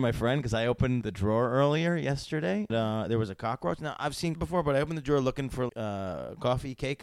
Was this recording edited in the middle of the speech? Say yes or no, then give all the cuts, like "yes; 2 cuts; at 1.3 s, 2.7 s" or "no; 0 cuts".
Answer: yes; 4 cuts; at 1.0 s, 2.7 s, 4.3 s, 5.7 s